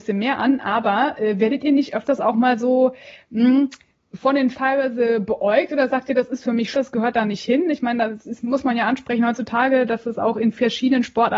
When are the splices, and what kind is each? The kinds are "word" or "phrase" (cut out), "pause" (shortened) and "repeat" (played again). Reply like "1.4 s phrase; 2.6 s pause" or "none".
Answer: 4.5 s word; 6.7 s word